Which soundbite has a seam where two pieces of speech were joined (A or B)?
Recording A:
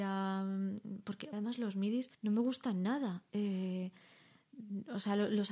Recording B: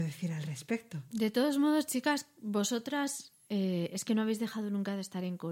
A